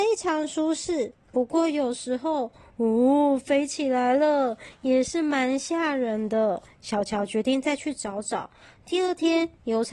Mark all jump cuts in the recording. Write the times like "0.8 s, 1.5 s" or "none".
none

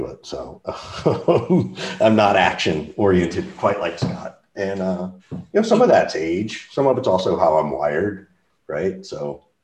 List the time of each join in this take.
5.2 s

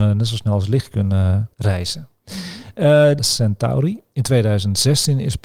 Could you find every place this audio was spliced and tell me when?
1.5 s, 3.2 s

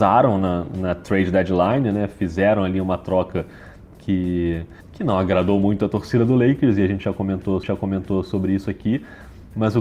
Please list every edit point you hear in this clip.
4.8 s, 7.6 s

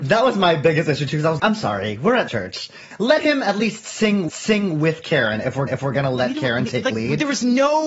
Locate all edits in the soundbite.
1.4 s, 2.3 s, 4.3 s, 5.7 s

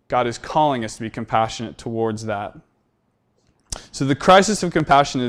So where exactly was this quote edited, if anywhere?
none

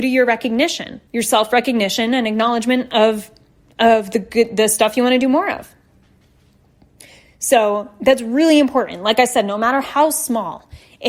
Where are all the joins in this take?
1.1 s

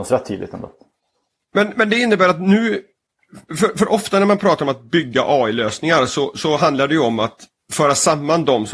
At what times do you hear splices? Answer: none

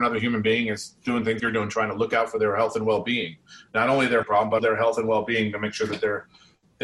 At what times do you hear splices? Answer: 1.4 s, 4.2 s, 4.6 s

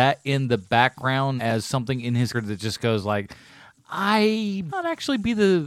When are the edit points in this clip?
1.4 s, 2.3 s, 4.7 s

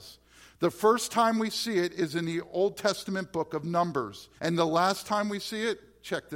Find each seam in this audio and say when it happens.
4.4 s

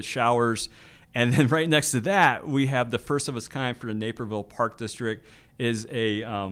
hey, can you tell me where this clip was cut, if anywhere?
none

